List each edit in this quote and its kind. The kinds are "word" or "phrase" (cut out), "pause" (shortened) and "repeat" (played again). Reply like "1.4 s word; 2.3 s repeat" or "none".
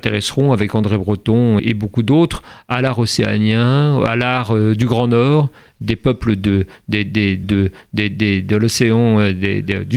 1.6 s word; 7.4 s repeat